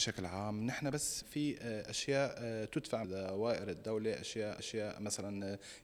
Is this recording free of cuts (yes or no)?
no